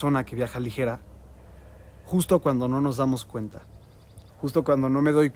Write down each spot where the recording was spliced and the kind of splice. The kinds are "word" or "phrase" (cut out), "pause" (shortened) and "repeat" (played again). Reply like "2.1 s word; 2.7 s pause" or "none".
4.3 s pause